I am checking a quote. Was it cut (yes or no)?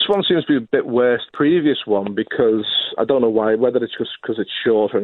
yes